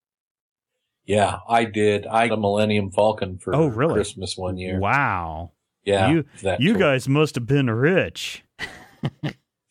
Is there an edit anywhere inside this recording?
yes; 2 cuts; at 2.3 s, 6.3 s

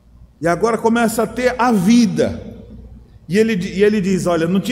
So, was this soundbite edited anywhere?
no; 0 cuts

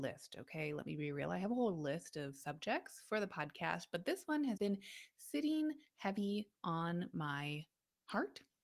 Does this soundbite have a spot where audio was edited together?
yes; 1 cut; at 4.6 s

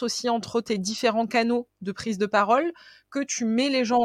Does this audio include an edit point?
no; 0 cuts

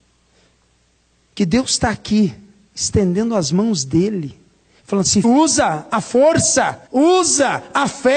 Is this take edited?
yes; 2 cuts; at 5.2 s, 6.9 s

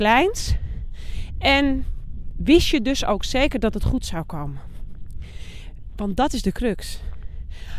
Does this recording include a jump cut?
no; 0 cuts

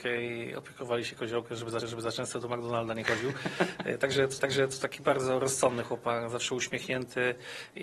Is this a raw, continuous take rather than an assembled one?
no; 2 cuts; at 1.8 s, 4.4 s

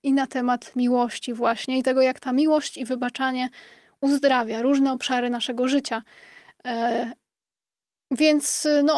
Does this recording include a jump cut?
no; 0 cuts

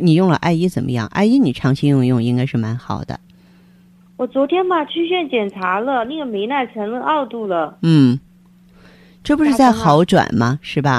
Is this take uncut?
yes; 0 cuts

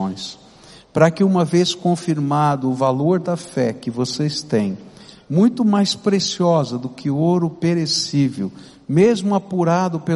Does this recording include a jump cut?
no; 0 cuts

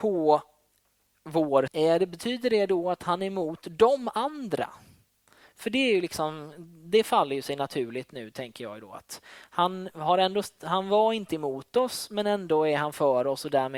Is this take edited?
yes; 1 cut; at 1.7 s

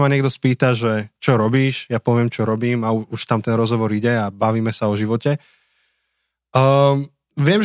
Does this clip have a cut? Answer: no; 0 cuts

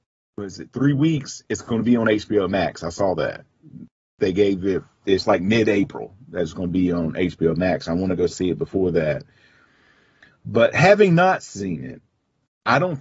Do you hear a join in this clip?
no; 0 cuts

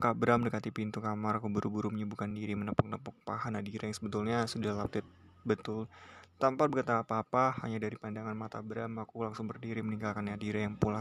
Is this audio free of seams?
yes; 0 cuts

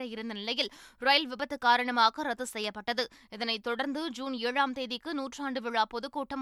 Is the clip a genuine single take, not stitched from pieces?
yes; 0 cuts

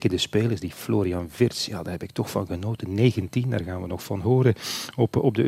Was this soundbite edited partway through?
no; 0 cuts

